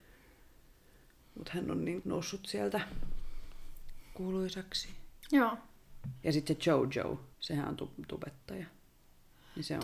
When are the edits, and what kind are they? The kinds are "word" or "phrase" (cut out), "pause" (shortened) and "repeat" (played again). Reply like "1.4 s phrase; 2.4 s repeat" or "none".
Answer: 2.0 s word; 7.3 s pause